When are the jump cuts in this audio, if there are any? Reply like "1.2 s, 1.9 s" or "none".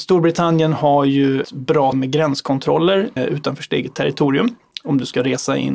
1.4 s, 1.9 s, 3.2 s